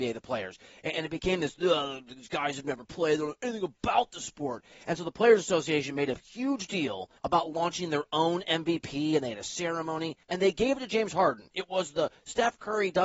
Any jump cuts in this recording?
yes; 2 cuts; at 7.2 s, 10.2 s

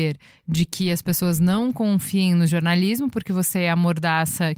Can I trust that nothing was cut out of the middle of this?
yes; 0 cuts

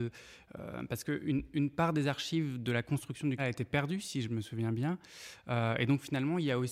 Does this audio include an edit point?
yes; 1 cut; at 3.4 s

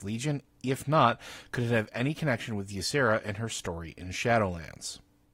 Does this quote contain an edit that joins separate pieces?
no; 0 cuts

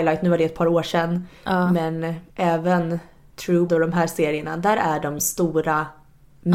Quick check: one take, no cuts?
no; 3 cuts; at 2.3 s, 3.7 s, 5.2 s

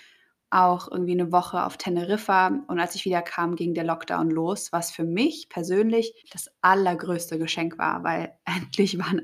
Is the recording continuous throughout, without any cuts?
no; 1 cut; at 6.2 s

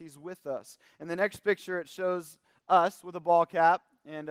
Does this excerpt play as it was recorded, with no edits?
yes; 0 cuts

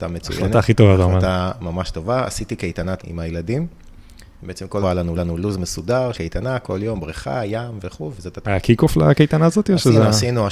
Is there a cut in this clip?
yes; 6 cuts; at 3.0 s, 4.3 s, 4.8 s, 5.2 s, 6.1 s, 8.4 s

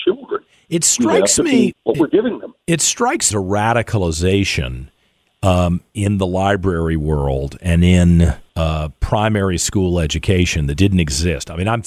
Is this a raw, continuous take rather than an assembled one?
no; 4 cuts; at 1.7 s, 3.3 s, 8.5 s, 10.8 s

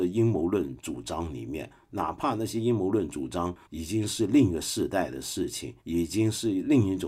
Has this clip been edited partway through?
yes; 2 cuts; at 3.6 s, 5.8 s

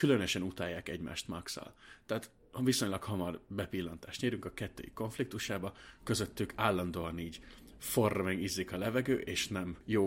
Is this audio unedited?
yes; 0 cuts

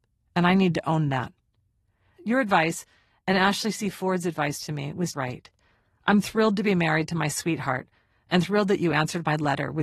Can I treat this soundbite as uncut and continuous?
no; 1 cut; at 5.1 s

